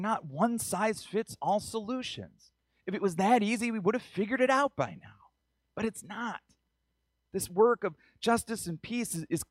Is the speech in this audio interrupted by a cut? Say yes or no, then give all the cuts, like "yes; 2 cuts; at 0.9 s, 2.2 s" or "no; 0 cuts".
no; 0 cuts